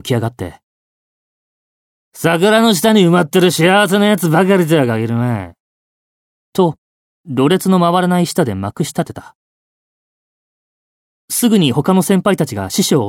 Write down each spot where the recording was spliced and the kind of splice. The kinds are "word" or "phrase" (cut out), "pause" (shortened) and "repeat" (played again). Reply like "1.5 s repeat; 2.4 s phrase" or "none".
none

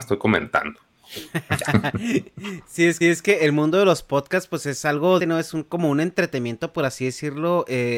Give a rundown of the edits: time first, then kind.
3.0 s repeat; 5.2 s word

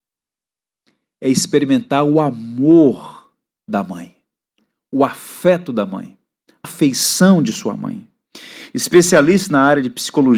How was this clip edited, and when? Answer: 6.6 s word

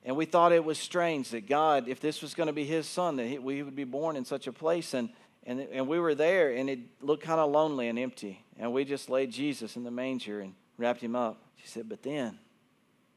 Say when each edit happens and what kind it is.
5.2 s pause; 8.5 s pause; 10.6 s pause; 11.5 s pause

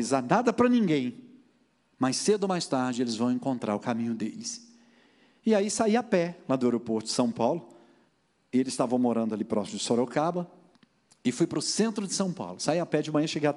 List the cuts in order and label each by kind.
8.1 s pause; 10.7 s pause

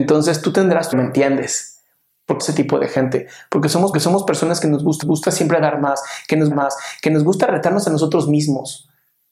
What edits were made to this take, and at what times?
0.9 s phrase; 2.4 s word; 3.9 s repeat; 5.0 s repeat; 6.5 s repeat

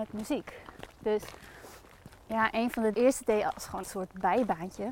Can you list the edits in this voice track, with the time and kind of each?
2.9 s phrase; 3.8 s word

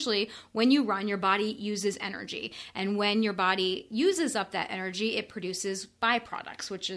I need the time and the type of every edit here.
none

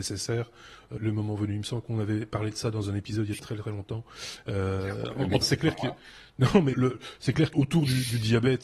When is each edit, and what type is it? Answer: 1.0 s word; 3.4 s word; 5.4 s word; 6.7 s word; 7.5 s word

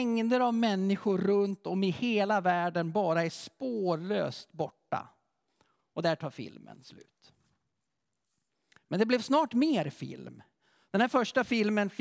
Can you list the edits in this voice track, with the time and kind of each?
none

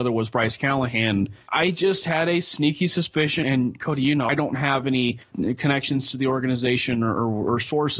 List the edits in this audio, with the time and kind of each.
3.4 s word; 4.3 s word

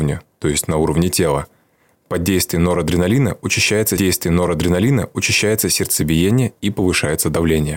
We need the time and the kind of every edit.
4.0 s repeat

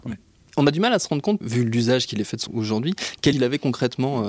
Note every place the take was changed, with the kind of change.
1.4 s word; 2.5 s word; 3.3 s word

